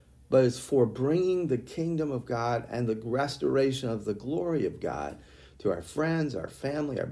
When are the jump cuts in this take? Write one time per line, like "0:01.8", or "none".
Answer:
none